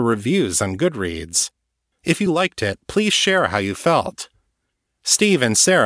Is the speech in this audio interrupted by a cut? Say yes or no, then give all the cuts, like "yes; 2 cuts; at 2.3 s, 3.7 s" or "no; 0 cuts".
no; 0 cuts